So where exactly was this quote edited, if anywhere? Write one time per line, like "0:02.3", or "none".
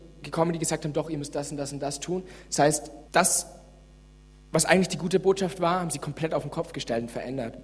0:03.0